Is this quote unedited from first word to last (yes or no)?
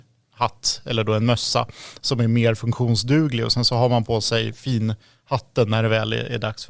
yes